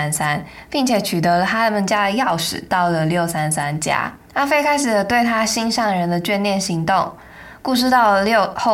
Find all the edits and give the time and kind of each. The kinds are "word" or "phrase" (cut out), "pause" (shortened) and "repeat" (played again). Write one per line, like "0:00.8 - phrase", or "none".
0:04.2 - pause